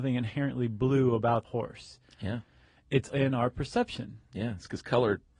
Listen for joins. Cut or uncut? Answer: cut